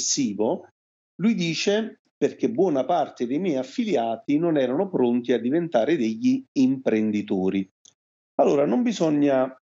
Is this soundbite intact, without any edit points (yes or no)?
yes